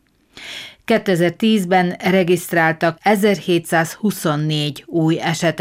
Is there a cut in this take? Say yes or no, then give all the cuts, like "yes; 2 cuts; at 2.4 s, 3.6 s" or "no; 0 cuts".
yes; 1 cut; at 3.0 s